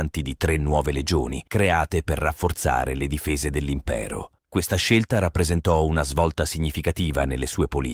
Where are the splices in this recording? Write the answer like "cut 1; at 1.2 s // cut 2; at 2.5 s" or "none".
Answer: cut 1; at 1.5 s // cut 2; at 4.4 s

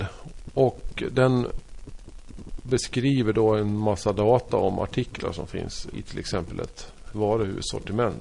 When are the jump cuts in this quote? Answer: cut 1; at 5.9 s // cut 2; at 7.1 s

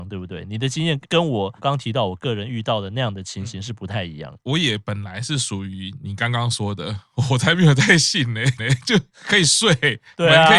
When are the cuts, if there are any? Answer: cut 1; at 8.6 s

